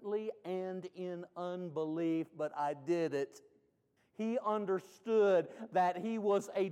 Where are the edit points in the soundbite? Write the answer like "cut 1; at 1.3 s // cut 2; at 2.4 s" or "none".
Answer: cut 1; at 4.0 s